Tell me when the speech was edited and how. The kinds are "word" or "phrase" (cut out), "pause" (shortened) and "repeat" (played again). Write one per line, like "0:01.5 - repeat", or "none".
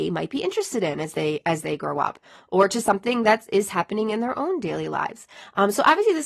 none